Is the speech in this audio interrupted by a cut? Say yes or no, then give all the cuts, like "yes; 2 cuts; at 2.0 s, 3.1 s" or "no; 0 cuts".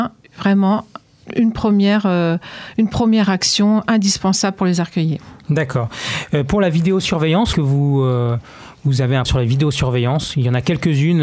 yes; 2 cuts; at 7.5 s, 9.2 s